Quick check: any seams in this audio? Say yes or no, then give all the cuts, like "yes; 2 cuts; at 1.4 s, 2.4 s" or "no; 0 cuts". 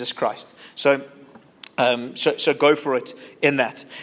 no; 0 cuts